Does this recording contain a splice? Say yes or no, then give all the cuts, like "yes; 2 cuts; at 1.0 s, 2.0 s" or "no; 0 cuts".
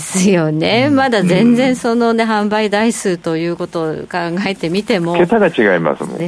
no; 0 cuts